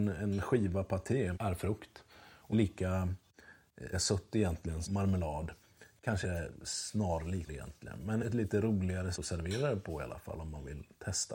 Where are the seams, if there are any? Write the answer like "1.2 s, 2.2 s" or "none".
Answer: 1.3 s, 2.5 s, 3.9 s, 4.8 s, 6.2 s, 7.5 s, 8.2 s, 9.1 s